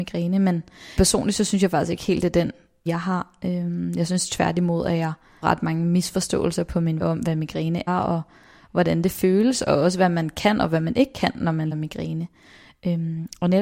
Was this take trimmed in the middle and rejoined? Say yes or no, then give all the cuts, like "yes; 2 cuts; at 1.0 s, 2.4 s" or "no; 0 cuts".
yes; 6 cuts; at 1.0 s, 2.9 s, 5.4 s, 7.0 s, 7.9 s, 11.7 s